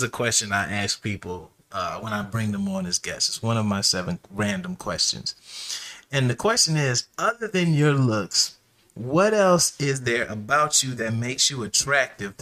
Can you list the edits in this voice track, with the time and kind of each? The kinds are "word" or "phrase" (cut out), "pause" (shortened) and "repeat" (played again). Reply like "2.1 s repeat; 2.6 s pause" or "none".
none

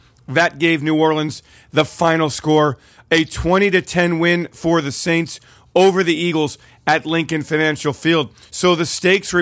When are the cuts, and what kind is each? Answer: none

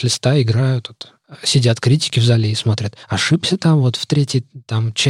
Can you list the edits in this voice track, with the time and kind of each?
3.0 s pause

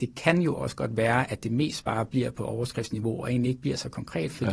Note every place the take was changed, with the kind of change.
none

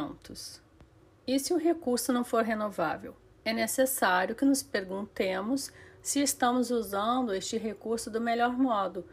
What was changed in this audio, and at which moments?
none

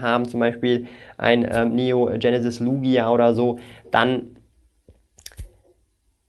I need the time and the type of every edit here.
none

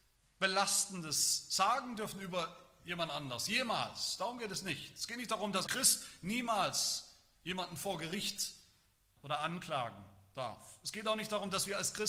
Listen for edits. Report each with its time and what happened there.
5.7 s word; 9.2 s word

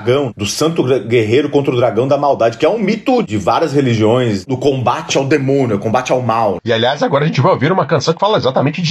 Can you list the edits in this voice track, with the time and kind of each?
none

